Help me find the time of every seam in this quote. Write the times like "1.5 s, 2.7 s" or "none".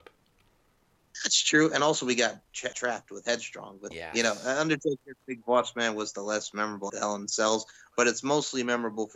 2.7 s, 3.9 s, 6.9 s